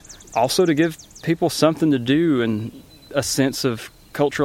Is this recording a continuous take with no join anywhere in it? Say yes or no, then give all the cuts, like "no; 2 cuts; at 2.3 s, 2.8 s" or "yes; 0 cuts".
yes; 0 cuts